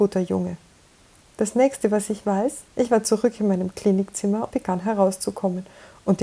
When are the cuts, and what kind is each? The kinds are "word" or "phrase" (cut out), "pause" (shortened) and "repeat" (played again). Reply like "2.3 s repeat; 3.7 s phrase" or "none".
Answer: 0.9 s pause; 2.7 s pause; 4.5 s word